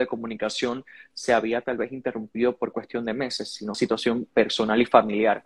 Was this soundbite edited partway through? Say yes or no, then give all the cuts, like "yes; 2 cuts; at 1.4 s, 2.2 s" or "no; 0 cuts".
yes; 1 cut; at 3.7 s